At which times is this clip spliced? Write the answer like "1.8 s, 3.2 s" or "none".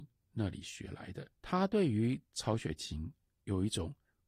1.3 s